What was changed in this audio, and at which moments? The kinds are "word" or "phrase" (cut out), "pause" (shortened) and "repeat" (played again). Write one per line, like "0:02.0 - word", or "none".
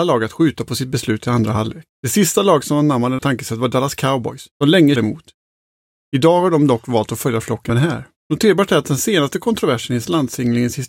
0:01.9 - pause
0:03.2 - word
0:04.5 - pause
0:05.0 - word
0:07.7 - word
0:08.2 - pause